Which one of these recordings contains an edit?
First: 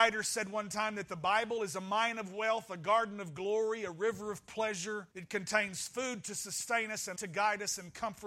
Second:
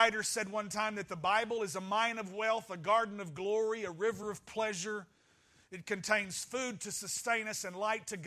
first; 2 cuts; at 5.1 s, 7.2 s

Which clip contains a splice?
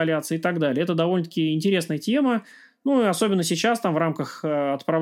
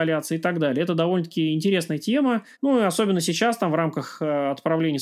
second; 1 cut; at 2.5 s

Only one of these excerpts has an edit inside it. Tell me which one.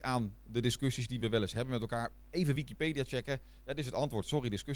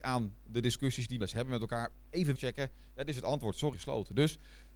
second; 3 cuts; at 1.2 s, 2.4 s, 3.7 s

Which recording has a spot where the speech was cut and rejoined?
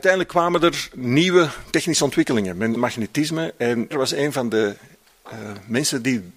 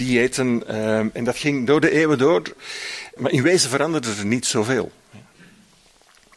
first; 2 cuts; at 2.8 s, 3.9 s

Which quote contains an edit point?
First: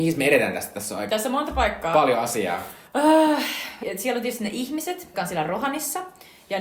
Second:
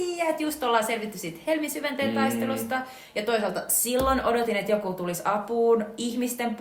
first; 4 cuts; at 1.1 s, 2.9 s, 3.8 s, 5.1 s

